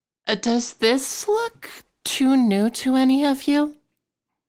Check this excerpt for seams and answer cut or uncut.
uncut